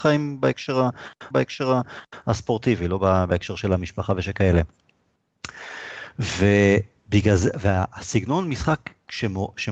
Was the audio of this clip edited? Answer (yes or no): yes